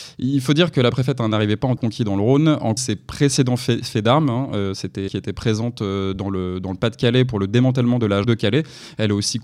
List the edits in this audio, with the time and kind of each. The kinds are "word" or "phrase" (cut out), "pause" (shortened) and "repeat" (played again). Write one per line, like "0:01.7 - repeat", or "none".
0:01.8 - word
0:02.8 - word
0:05.1 - word
0:08.2 - word